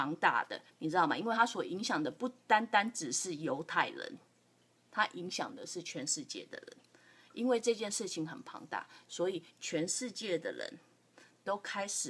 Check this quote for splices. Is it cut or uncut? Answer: uncut